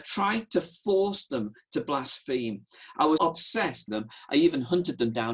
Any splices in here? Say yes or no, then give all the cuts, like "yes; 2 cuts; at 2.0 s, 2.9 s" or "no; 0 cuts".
yes; 2 cuts; at 3.2 s, 3.9 s